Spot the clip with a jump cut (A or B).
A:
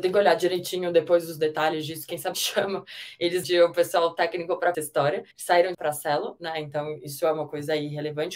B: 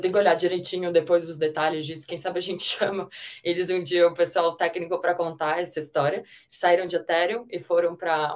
A